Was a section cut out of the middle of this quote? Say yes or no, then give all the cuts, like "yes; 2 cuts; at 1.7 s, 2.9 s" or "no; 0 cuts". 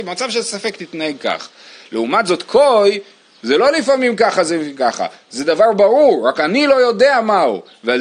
no; 0 cuts